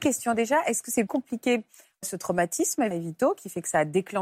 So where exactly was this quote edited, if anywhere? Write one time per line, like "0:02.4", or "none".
0:01.1
0:02.0
0:02.9